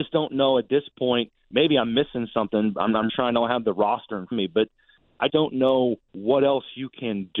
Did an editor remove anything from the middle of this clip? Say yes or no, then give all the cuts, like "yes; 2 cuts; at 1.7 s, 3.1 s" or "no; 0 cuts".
yes; 4 cuts; at 3.1 s, 4.3 s, 5.3 s, 6.0 s